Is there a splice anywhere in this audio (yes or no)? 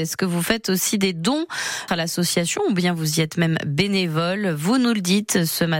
yes